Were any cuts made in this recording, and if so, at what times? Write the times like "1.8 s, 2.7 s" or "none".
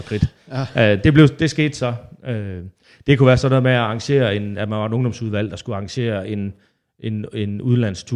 none